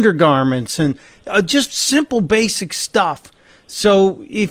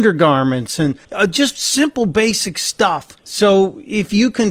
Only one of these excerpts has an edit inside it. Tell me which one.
second; 2 cuts; at 1.0 s, 3.2 s

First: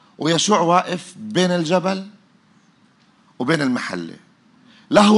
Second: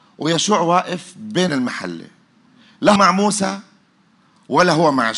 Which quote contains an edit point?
second; 2 cuts; at 1.5 s, 3.0 s

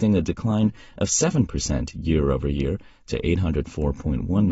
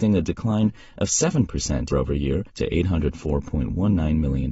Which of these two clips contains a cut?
second; 2 cuts; at 1.9 s, 2.5 s

